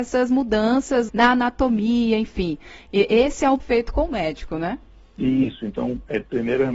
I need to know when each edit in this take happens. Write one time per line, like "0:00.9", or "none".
0:01.1
0:03.6
0:04.9